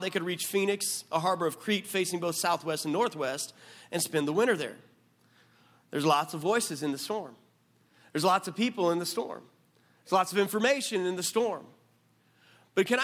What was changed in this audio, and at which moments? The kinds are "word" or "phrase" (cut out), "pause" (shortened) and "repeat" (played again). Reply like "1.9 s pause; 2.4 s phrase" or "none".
none